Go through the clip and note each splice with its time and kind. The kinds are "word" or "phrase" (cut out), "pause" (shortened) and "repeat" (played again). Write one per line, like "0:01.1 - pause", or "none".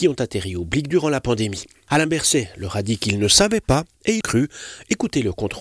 0:04.2 - word